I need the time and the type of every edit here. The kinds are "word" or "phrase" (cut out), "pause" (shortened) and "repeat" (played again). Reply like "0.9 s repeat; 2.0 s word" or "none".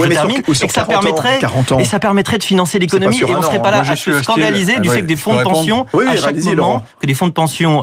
none

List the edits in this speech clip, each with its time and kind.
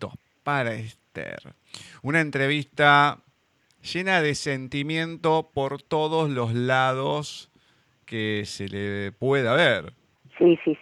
none

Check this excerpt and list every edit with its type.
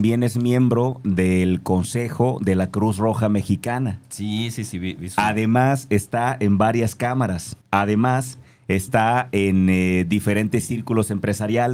7.6 s pause

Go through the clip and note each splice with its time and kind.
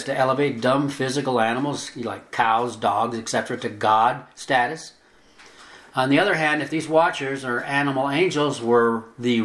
none

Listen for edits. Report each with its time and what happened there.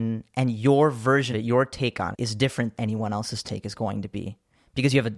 1.3 s word; 2.1 s word; 2.7 s word

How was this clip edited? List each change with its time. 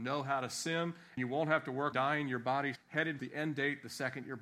1.2 s word; 1.9 s word; 2.8 s word; 3.2 s word

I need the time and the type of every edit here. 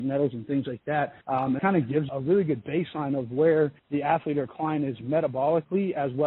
1.2 s pause; 1.6 s phrase; 2.1 s phrase; 3.8 s pause

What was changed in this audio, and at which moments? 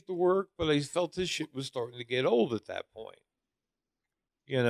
none

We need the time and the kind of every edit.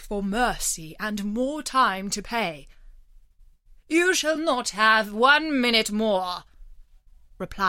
none

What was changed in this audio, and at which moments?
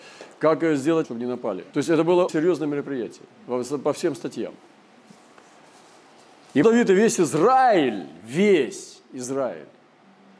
1.0 s word; 1.7 s pause; 2.3 s word; 3.3 s pause; 6.6 s word

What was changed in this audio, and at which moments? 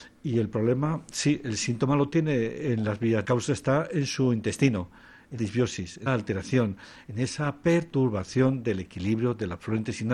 3.2 s phrase; 5.4 s word; 6.1 s word

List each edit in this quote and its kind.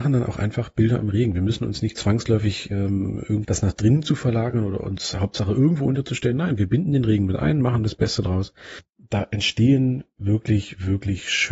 3.4 s phrase

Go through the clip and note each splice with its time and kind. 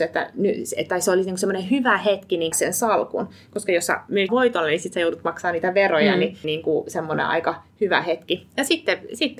2.5 s phrase; 4.3 s word; 6.4 s phrase

